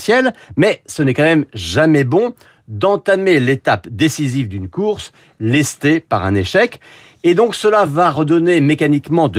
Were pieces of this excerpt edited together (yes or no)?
no